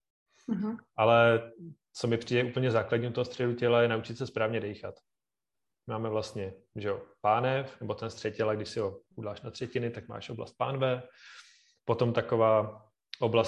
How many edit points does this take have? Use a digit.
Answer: 0